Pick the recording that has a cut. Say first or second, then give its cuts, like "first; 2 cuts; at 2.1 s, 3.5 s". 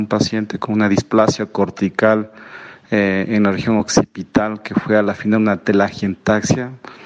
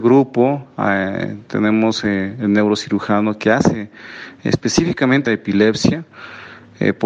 second; 1 cut; at 5.3 s